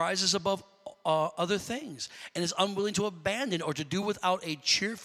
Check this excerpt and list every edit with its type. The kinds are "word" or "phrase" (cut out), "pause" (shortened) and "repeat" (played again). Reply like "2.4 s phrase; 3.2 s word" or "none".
none